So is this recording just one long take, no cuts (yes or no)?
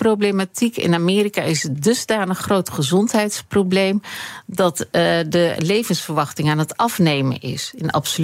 yes